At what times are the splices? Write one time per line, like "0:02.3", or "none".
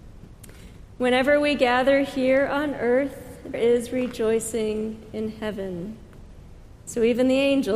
0:03.5

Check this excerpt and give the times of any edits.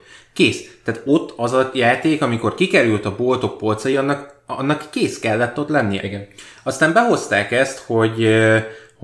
none

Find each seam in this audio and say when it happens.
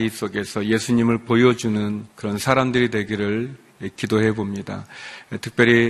0:02.1

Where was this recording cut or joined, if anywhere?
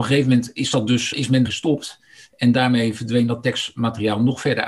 0:01.1
0:01.4

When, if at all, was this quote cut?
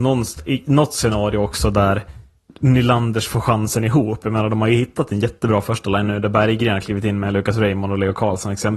none

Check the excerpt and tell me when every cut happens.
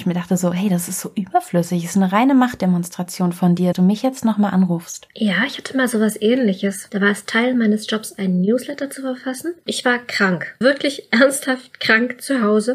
0:03.7
0:09.7
0:10.6

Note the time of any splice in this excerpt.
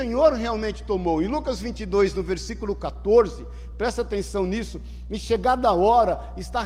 none

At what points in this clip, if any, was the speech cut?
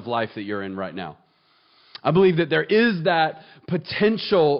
none

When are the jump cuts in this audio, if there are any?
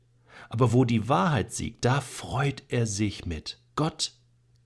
0:03.7

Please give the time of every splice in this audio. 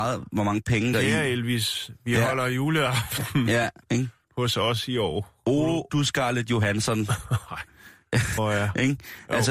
0:00.9
0:05.9
0:08.4

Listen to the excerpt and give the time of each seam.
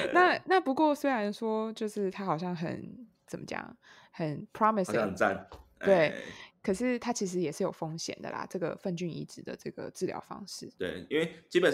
none

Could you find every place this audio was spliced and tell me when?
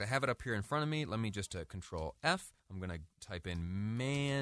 0:02.6

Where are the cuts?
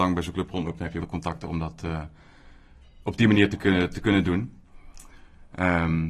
0:01.0

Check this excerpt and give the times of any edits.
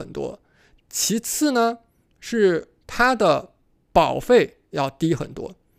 none

